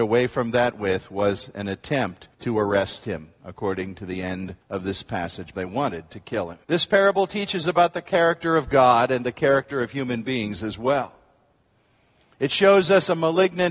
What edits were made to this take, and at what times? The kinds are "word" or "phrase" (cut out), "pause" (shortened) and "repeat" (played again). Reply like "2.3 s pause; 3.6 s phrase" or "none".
2.3 s pause; 4.6 s pause; 5.5 s word; 6.6 s pause